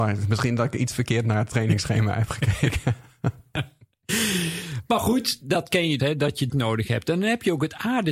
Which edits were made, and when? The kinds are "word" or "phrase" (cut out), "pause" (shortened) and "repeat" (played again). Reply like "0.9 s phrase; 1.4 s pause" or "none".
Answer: 6.0 s word; 6.5 s word